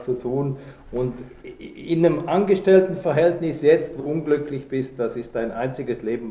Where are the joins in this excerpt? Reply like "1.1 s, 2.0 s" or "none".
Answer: 4.0 s